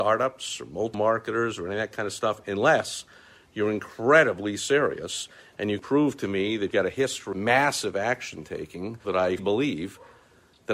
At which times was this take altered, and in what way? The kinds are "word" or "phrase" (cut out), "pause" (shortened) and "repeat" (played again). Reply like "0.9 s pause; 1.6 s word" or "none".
0.9 s word; 5.8 s word; 6.7 s word; 7.3 s word; 9.0 s word; 9.4 s word